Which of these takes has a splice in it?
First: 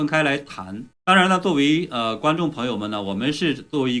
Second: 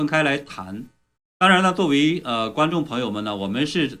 first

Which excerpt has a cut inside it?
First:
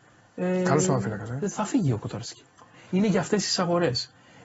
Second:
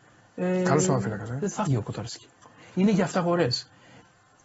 second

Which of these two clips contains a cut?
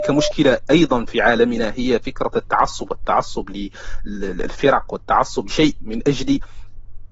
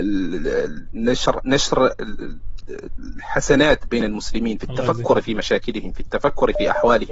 first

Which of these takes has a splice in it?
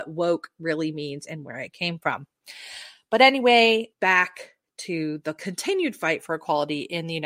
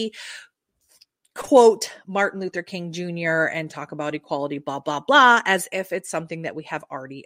first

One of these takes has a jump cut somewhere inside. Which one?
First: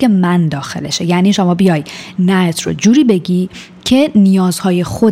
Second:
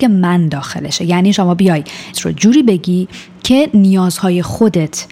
second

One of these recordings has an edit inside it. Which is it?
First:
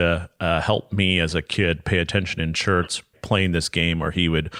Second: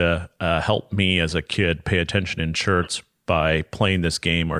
first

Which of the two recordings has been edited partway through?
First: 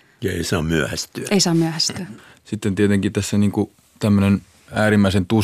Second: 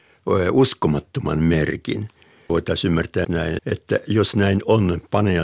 second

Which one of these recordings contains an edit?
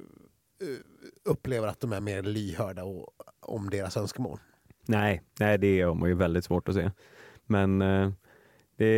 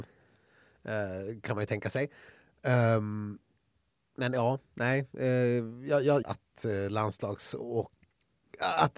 second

